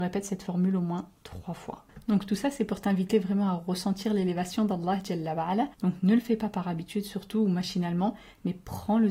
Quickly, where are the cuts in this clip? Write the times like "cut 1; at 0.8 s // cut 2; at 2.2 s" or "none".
cut 1; at 5.7 s